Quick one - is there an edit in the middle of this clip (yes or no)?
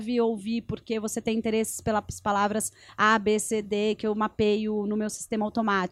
no